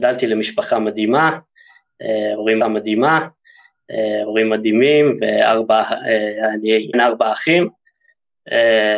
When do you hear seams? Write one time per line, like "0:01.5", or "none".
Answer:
0:02.6
0:06.9